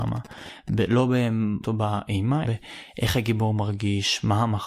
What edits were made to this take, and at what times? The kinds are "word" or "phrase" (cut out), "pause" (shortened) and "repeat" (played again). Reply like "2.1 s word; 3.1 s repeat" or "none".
1.6 s word; 2.4 s phrase